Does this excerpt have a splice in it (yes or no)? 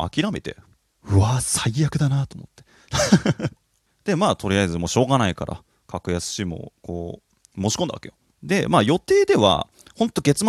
no